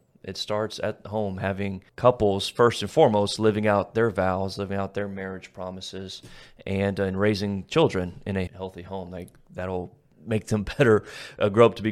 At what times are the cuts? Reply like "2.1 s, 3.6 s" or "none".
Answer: 1.9 s, 8.5 s, 10.1 s